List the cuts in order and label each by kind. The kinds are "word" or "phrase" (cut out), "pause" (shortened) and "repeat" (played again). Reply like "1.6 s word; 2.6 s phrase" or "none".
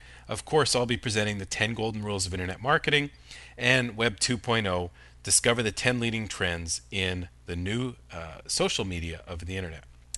none